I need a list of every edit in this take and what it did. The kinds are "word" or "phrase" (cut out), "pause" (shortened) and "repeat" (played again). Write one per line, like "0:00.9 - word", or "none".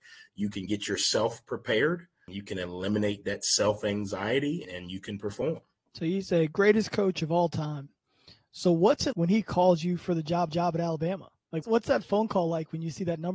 0:04.6 - word
0:05.7 - pause
0:09.1 - word
0:10.5 - repeat
0:11.6 - word